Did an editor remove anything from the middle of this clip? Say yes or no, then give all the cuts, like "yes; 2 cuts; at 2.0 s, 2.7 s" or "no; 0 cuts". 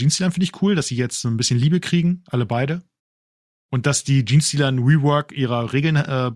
no; 0 cuts